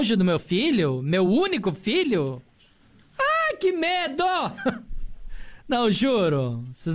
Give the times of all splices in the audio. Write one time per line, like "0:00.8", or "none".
none